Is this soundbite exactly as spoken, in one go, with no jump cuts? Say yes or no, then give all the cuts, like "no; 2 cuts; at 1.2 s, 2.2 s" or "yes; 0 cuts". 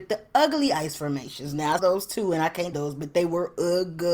no; 2 cuts; at 1.8 s, 2.7 s